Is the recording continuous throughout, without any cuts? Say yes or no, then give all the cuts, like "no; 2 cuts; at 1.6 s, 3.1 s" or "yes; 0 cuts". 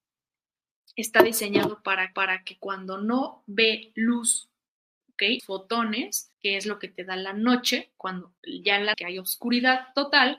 no; 5 cuts; at 2.1 s, 5.4 s, 6.3 s, 8.4 s, 8.9 s